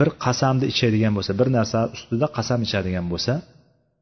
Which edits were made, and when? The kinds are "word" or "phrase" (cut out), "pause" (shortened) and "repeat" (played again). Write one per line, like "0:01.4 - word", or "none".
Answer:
none

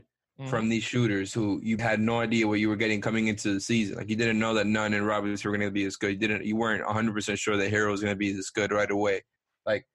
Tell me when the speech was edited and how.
0:01.8 - word

